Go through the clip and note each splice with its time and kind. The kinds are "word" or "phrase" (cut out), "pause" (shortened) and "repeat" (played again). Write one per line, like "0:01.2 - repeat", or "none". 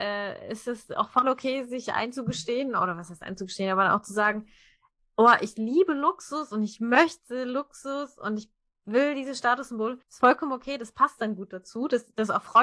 0:10.0 - pause

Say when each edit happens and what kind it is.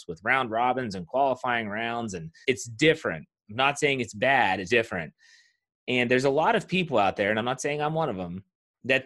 0:02.4 - word
0:04.7 - word

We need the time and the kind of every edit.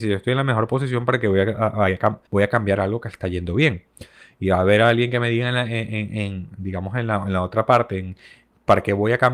0:02.3 - pause

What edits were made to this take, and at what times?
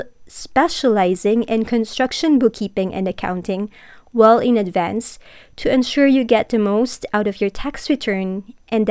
none

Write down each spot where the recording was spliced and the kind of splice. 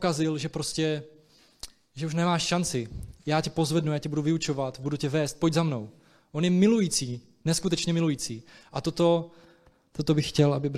none

